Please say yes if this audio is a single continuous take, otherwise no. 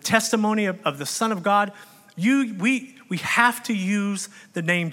yes